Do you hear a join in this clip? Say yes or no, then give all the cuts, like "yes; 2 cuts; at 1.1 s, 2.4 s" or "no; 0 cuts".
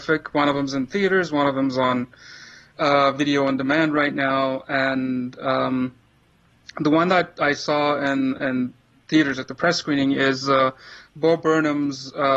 no; 0 cuts